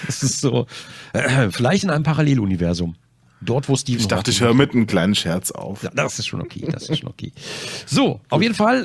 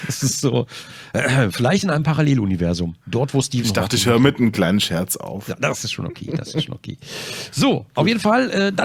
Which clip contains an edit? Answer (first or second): second